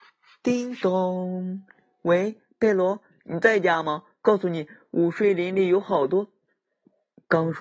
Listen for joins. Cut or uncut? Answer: uncut